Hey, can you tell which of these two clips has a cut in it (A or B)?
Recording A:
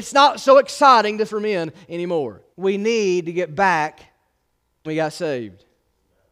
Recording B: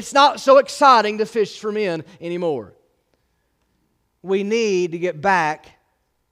A